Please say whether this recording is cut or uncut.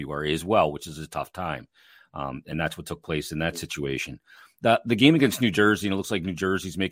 uncut